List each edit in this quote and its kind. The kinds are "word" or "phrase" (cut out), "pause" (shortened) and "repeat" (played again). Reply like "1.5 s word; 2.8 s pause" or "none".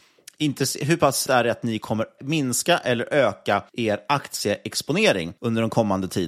1.3 s word; 2.2 s word; 3.7 s pause; 5.4 s pause